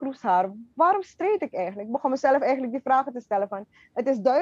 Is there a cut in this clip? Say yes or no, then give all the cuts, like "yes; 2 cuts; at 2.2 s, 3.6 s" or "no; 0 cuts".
no; 0 cuts